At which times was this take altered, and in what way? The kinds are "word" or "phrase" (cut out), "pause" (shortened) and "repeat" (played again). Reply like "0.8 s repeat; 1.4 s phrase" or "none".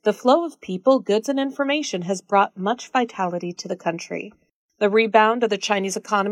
none